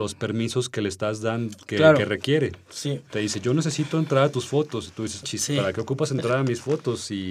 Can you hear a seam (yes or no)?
yes